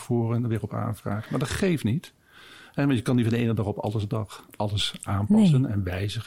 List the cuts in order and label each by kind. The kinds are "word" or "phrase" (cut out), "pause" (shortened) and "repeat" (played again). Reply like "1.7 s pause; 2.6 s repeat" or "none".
none

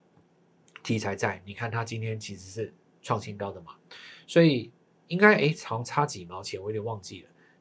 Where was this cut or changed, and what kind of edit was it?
none

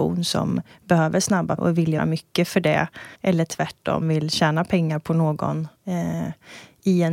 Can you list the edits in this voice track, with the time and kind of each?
1.6 s word; 2.0 s word; 3.1 s pause; 4.0 s phrase; 5.7 s pause

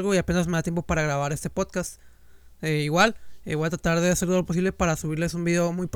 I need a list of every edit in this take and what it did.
none

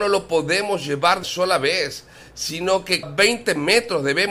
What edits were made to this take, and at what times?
1.2 s word; 3.0 s word

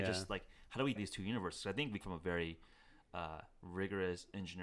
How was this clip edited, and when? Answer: 1.0 s word; 2.0 s word

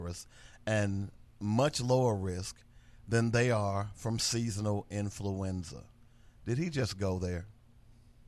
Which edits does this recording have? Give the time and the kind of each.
none

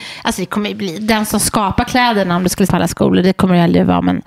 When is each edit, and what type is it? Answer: 2.7 s phrase

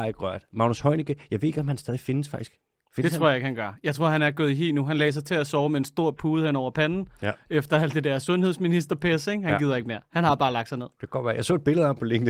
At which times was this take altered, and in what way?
none

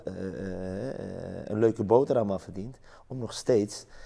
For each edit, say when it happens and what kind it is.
none

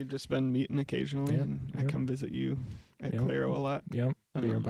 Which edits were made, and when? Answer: none

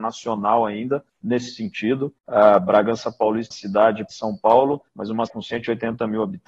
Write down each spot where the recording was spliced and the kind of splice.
1.1 s pause; 2.2 s pause; 3.5 s phrase; 4.1 s phrase; 4.9 s pause; 5.3 s word

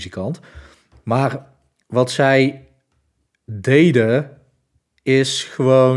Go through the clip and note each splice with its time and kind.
none

